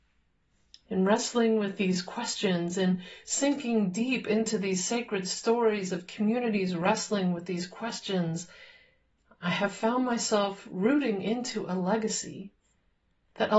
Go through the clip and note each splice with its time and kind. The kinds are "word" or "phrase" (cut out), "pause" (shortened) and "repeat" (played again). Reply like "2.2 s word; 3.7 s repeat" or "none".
none